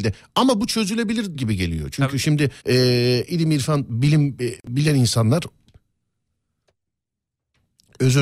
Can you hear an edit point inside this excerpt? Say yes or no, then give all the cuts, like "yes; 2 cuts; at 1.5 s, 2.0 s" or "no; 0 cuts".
yes; 2 cuts; at 1.3 s, 2.6 s